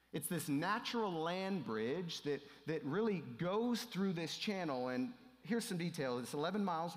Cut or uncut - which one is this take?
uncut